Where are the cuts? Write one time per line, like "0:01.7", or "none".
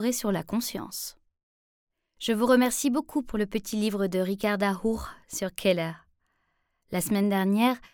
none

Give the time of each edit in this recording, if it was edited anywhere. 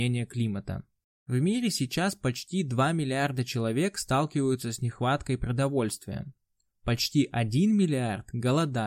none

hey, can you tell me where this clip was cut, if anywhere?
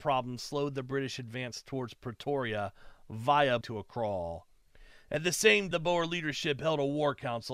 0:03.6
0:05.7

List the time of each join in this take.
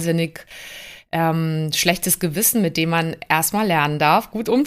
none

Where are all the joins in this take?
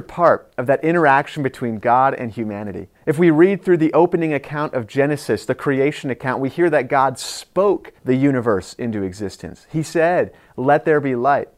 0:03.0
0:08.0

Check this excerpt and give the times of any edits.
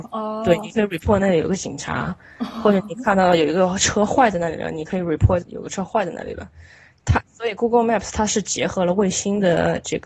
none

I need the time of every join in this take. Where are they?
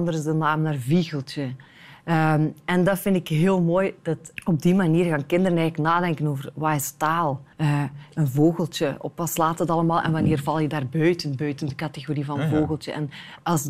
0:04.3
0:07.5

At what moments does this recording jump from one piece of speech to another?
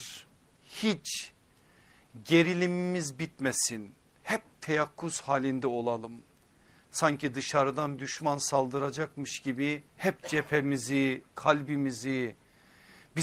0:08.0
0:09.9
0:11.3

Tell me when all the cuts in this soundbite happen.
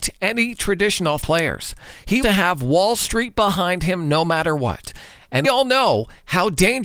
0:01.2
0:02.2
0:05.4

